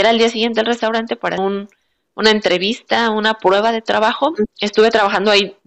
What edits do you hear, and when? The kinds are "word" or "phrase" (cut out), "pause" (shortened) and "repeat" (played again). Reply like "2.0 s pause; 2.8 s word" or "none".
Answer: 1.4 s word

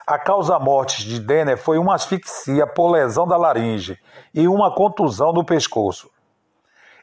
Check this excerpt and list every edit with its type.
none

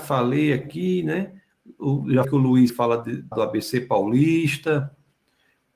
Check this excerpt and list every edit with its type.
2.2 s word; 2.7 s word; 3.3 s word

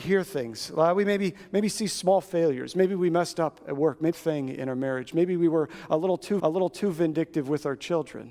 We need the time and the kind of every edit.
4.1 s phrase; 6.4 s repeat

